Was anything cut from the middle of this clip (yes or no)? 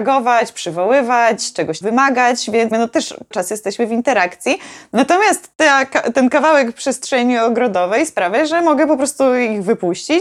yes